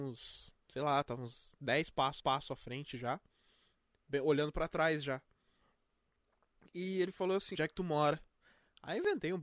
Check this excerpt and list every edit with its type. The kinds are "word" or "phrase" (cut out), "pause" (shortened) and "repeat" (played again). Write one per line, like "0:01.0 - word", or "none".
0:02.2 - repeat
0:07.5 - phrase